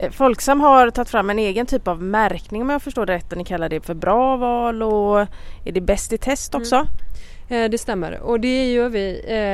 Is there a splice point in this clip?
no; 0 cuts

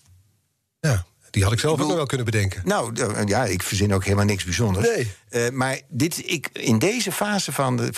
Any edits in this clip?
no; 0 cuts

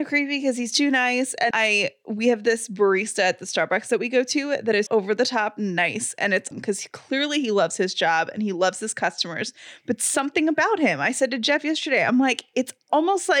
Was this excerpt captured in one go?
no; 3 cuts; at 1.5 s, 4.9 s, 6.5 s

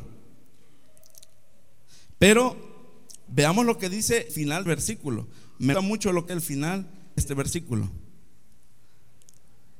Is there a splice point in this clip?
yes; 6 cuts; at 3.3 s, 4.3 s, 4.7 s, 5.7 s, 6.3 s, 7.2 s

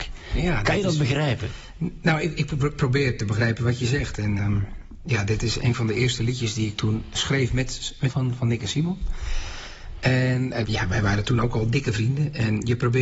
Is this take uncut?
no; 3 cuts; at 4.4 s, 8.1 s, 10.6 s

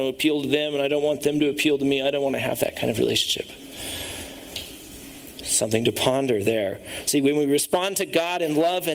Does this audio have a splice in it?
no; 0 cuts

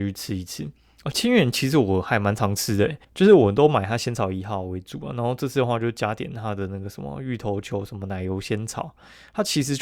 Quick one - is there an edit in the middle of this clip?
yes; 1 cut; at 3.0 s

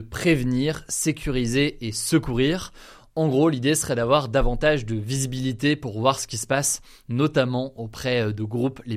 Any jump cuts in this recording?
no; 0 cuts

